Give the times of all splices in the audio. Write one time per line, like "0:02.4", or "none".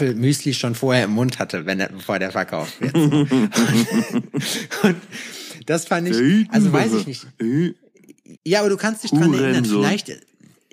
0:08.4